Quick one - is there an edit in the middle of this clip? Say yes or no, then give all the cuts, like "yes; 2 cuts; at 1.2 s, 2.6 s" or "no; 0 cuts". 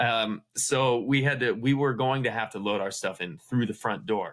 no; 0 cuts